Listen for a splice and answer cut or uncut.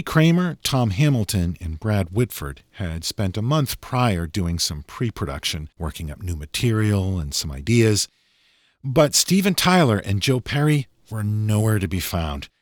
cut